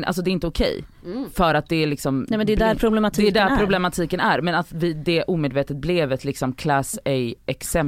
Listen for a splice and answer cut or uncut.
uncut